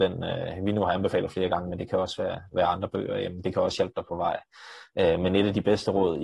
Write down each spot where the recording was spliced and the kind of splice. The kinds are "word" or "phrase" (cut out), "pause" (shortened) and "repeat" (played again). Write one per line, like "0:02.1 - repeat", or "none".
none